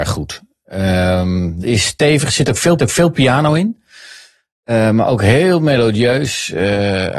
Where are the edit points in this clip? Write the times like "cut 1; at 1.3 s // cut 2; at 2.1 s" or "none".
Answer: cut 1; at 1.6 s // cut 2; at 2.8 s